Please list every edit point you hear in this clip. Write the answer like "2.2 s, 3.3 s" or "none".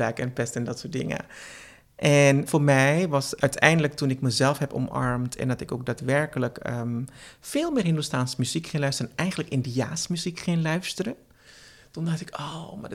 2.5 s, 3.4 s